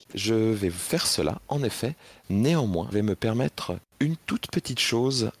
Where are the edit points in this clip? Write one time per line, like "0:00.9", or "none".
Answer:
0:02.9